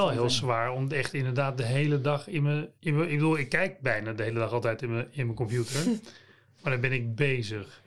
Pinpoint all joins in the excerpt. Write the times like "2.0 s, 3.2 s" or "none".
2.8 s